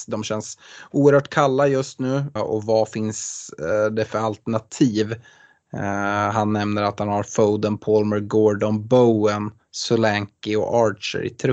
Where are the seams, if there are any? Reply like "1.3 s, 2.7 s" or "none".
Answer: 2.4 s